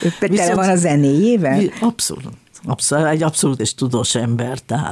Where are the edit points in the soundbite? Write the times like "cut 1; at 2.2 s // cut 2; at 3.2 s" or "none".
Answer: cut 1; at 3.6 s